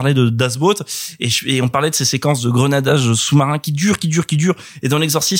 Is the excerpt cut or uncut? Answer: uncut